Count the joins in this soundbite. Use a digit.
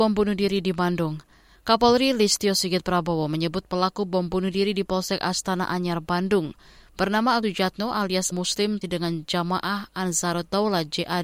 3